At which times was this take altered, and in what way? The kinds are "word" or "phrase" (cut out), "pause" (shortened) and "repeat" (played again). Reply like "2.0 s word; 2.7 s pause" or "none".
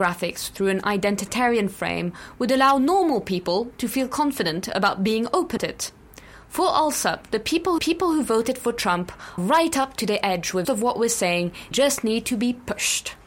5.6 s word; 7.8 s repeat; 9.4 s word; 10.6 s word; 11.7 s word